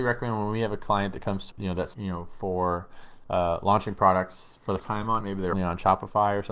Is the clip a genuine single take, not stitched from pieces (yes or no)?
no